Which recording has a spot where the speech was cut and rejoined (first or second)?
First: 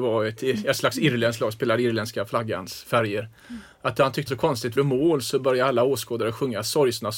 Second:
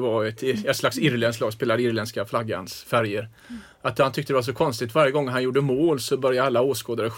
first